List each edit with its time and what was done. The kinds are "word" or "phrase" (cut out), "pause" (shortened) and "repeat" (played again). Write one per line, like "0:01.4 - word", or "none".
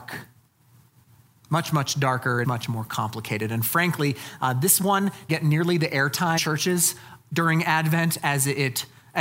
0:02.4 - word
0:05.3 - word
0:06.4 - word